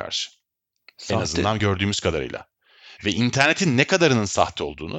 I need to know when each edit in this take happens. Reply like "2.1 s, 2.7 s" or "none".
none